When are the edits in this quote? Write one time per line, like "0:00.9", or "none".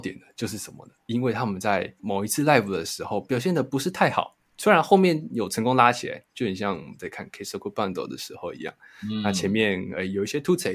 none